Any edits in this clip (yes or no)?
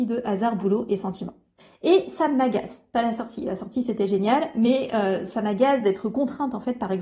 no